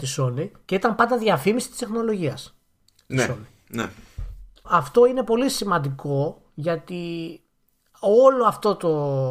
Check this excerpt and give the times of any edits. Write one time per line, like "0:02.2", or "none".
0:04.6